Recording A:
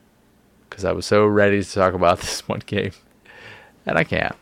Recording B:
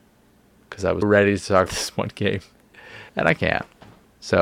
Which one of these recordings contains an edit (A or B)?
B